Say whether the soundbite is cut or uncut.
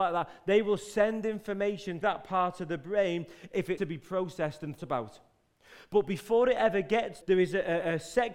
cut